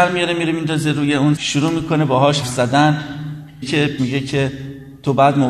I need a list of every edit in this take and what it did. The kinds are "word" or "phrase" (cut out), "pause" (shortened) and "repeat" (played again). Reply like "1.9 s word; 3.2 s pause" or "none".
1.4 s word; 2.4 s word; 3.6 s word; 4.0 s word